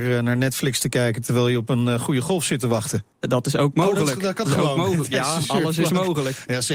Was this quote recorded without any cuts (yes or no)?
no